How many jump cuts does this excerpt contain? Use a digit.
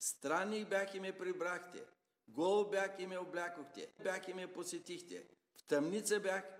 1